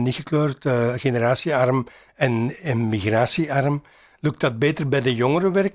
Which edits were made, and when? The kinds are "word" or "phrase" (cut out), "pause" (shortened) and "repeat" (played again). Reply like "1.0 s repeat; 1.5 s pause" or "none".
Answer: none